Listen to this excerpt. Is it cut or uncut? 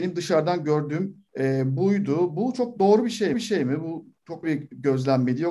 cut